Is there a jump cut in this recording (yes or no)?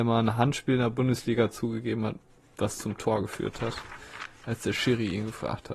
no